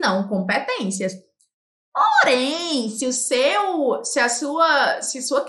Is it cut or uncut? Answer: uncut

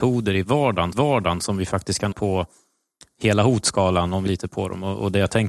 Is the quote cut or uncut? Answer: cut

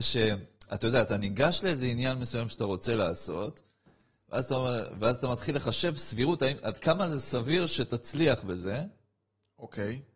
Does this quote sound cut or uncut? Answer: uncut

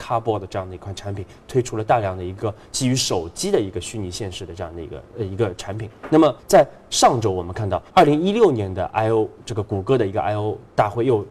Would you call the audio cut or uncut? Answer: cut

